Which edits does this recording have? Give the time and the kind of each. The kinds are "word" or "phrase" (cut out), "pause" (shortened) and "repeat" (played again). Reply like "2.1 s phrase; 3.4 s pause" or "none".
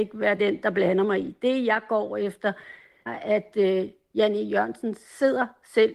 3.1 s phrase